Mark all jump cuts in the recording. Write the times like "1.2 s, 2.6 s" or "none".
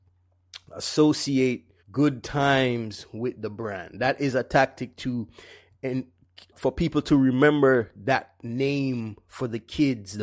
1.8 s, 6.5 s